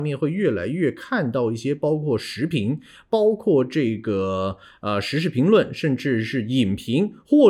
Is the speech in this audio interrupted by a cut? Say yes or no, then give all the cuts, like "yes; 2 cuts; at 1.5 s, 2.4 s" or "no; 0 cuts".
no; 0 cuts